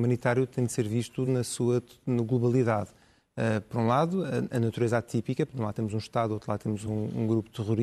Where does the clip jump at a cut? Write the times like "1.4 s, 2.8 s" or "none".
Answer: none